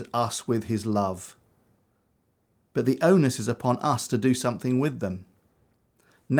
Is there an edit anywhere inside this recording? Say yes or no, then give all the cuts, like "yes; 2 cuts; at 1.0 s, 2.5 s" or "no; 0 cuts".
no; 0 cuts